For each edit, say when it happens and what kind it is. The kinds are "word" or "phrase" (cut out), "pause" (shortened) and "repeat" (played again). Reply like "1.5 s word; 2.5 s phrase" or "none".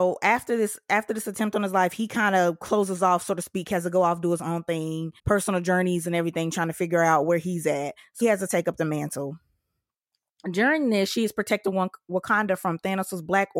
5.2 s pause; 8.2 s word